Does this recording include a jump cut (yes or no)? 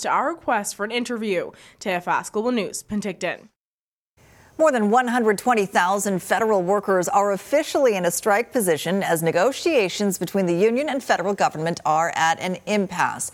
no